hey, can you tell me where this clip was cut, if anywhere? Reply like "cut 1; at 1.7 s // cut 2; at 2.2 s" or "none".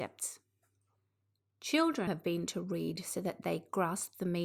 cut 1; at 2.1 s // cut 2; at 2.5 s